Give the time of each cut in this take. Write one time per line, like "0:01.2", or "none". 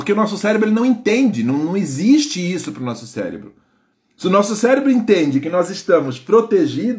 0:03.9